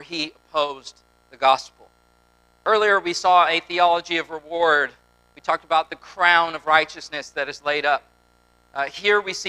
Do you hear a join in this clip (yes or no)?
no